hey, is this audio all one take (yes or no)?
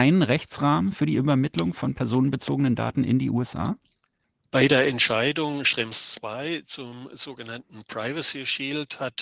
yes